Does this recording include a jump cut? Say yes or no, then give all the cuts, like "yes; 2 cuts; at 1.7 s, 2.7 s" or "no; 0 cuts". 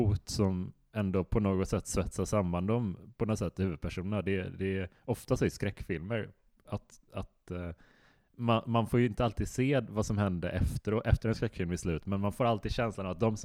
no; 0 cuts